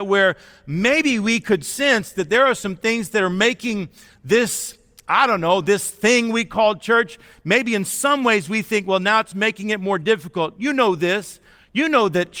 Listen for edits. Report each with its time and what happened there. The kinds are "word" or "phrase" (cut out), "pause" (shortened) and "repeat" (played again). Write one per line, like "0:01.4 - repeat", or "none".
none